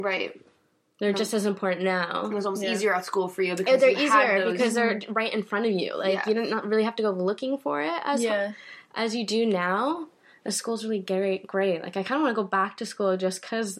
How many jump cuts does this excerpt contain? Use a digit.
0